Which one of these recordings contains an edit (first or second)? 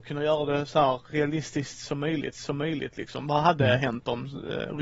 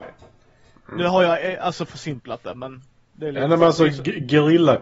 first